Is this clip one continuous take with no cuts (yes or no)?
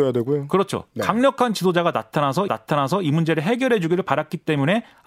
no